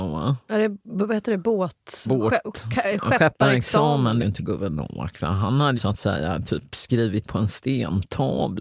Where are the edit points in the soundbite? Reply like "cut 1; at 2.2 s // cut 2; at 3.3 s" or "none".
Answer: cut 1; at 2.1 s // cut 2; at 4.2 s // cut 3; at 5.8 s // cut 4; at 7.2 s

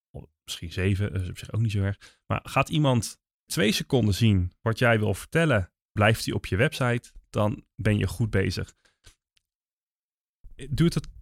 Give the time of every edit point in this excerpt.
cut 1; at 3.5 s // cut 2; at 6.0 s

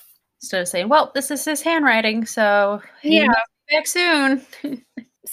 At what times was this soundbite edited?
none

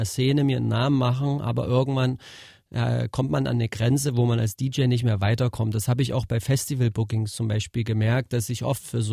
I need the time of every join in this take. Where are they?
none

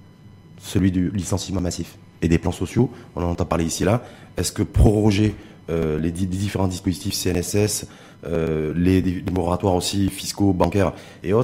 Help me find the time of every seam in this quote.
none

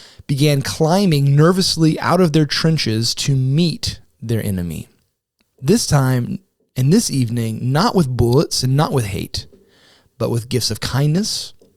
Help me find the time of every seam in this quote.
none

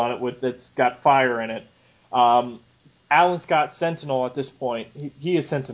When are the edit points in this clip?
cut 1; at 3.0 s

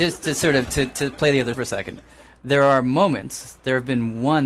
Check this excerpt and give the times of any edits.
cut 1; at 1.5 s

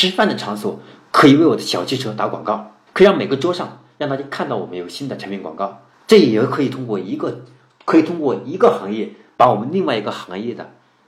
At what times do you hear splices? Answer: cut 1; at 2.9 s // cut 2; at 5.9 s

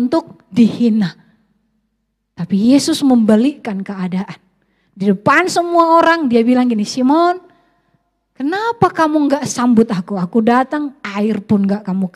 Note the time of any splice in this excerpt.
none

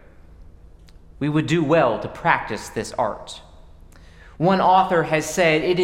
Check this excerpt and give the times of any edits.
none

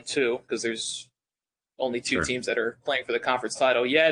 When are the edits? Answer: none

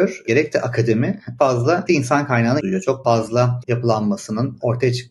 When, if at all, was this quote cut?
cut 1; at 1.4 s // cut 2; at 1.9 s // cut 3; at 2.6 s // cut 4; at 3.0 s // cut 5; at 3.6 s

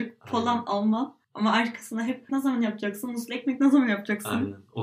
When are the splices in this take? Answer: cut 1; at 1.2 s // cut 2; at 2.3 s

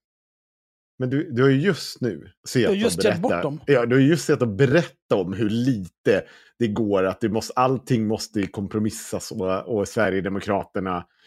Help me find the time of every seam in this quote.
cut 1; at 2.4 s

